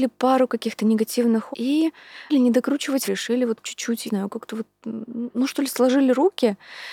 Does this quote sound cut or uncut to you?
cut